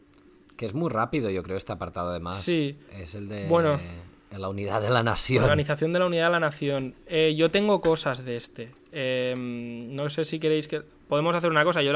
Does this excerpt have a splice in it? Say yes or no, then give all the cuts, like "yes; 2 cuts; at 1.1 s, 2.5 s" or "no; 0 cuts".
no; 0 cuts